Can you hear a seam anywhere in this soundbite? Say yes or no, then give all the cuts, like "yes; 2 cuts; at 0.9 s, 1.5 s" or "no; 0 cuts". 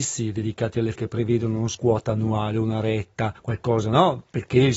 yes; 2 cuts; at 1.0 s, 1.7 s